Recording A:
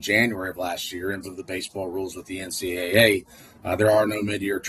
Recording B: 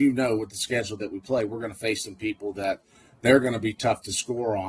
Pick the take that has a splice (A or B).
A